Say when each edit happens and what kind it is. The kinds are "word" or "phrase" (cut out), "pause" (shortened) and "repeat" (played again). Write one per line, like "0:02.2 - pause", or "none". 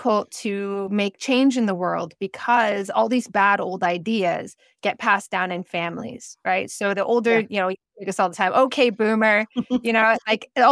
none

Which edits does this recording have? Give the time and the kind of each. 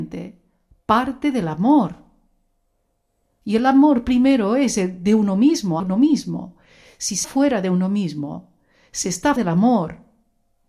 0:05.8 - word
0:07.2 - word
0:09.4 - word

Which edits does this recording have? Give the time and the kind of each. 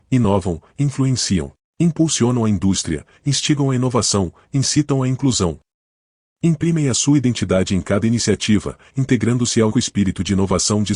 0:01.6 - pause
0:09.7 - word

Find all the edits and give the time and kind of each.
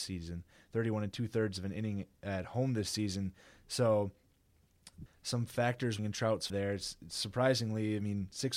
0:02.2 - pause
0:05.1 - phrase
0:06.0 - word
0:06.5 - word

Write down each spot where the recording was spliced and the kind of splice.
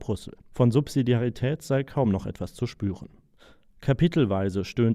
none

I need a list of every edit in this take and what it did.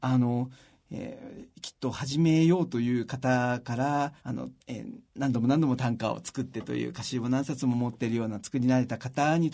0:04.2 - pause
0:04.6 - pause
0:05.1 - pause

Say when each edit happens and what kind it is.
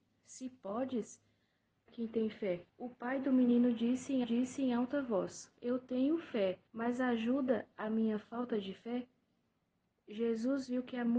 0:01.9 - phrase
0:02.7 - pause
0:04.2 - repeat
0:05.6 - pause
0:06.7 - pause

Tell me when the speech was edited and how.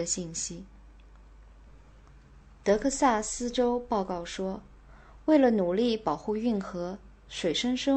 none

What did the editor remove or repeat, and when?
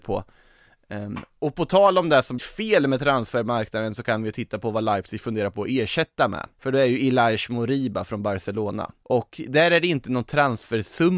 0:02.4 - word
0:06.5 - pause
0:09.0 - pause

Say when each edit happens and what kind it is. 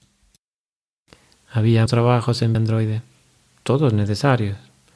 0:01.9 - word
0:02.5 - word

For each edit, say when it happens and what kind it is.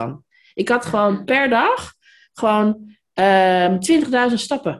none

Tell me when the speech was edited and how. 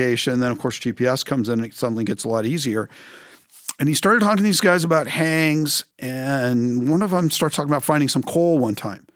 0:05.9 - pause

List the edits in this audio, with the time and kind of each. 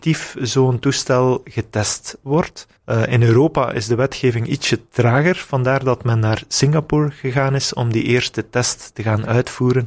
0:02.8 - pause

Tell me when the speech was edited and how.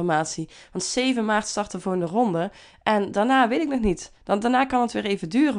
none

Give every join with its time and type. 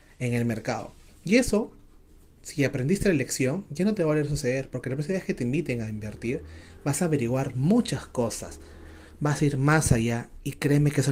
none

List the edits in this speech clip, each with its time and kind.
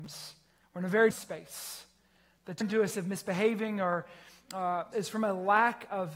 0:01.1 - word
0:02.6 - word
0:02.9 - word
0:04.9 - word

